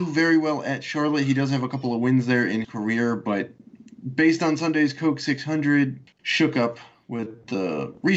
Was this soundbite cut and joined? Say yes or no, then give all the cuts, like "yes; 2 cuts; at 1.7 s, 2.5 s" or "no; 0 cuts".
yes; 1 cut; at 2.6 s